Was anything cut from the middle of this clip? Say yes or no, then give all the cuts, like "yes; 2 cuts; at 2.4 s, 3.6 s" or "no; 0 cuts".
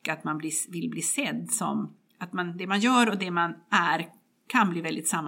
no; 0 cuts